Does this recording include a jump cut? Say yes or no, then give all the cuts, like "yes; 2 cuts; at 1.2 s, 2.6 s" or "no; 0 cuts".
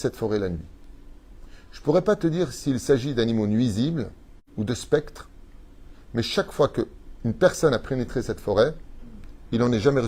no; 0 cuts